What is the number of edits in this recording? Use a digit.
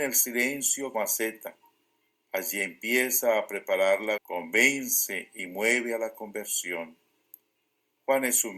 2